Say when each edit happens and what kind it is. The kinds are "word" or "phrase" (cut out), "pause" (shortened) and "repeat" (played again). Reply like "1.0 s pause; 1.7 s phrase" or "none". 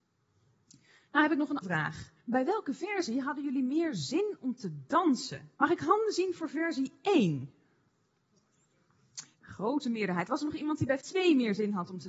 1.6 s word; 2.2 s pause; 5.5 s pause; 9.3 s pause; 11.0 s word